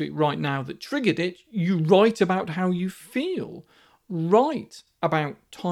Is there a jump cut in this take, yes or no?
no